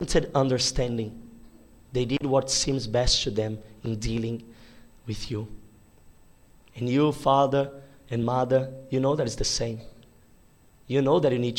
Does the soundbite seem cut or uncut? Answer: uncut